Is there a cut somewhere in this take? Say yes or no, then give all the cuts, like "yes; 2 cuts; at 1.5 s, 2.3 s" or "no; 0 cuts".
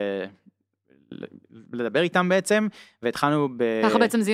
no; 0 cuts